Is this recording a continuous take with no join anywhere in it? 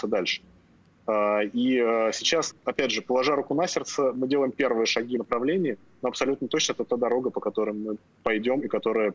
no; 2 cuts; at 2.5 s, 5.2 s

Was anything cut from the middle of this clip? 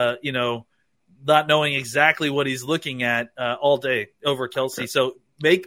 no; 0 cuts

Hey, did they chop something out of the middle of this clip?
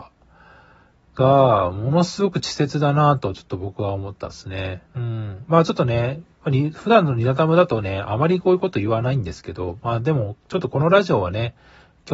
yes; 2 cuts; at 4.9 s, 6.3 s

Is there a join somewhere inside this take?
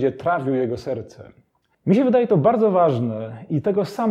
no; 0 cuts

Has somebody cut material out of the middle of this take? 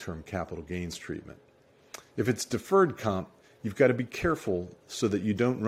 no; 0 cuts

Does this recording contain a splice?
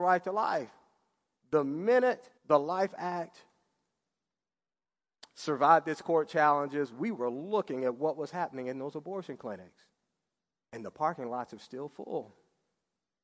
yes; 1 cut; at 2.4 s

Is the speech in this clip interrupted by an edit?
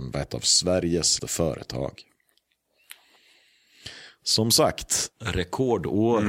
yes; 1 cut; at 1.2 s

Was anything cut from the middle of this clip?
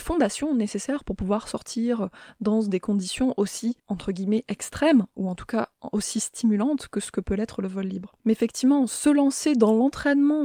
yes; 2 cuts; at 3.8 s, 8.2 s

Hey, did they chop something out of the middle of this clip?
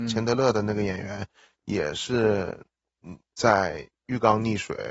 no; 0 cuts

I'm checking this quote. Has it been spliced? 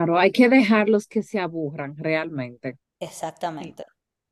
no; 0 cuts

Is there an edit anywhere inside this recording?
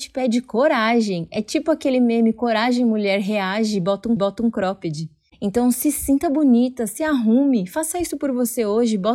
yes; 1 cut; at 4.2 s

